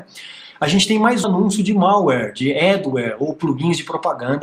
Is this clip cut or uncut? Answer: cut